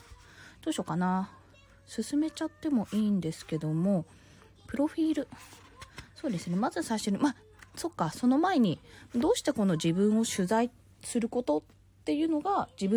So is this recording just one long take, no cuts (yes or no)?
yes